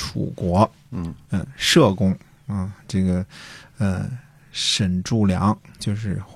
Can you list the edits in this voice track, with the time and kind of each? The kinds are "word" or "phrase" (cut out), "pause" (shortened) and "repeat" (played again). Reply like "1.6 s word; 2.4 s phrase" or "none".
none